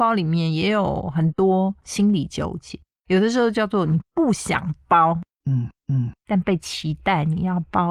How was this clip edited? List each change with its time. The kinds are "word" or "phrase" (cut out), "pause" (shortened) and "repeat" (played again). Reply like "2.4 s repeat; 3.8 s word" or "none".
2.9 s word; 5.8 s repeat